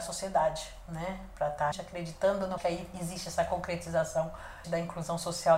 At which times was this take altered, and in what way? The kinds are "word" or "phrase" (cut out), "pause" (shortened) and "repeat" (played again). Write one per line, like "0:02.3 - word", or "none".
0:01.7 - word
0:02.6 - word
0:04.6 - word